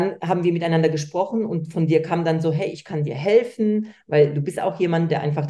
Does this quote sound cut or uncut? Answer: uncut